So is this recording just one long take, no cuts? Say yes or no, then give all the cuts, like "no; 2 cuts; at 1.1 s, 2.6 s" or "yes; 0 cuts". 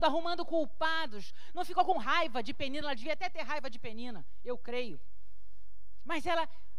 yes; 0 cuts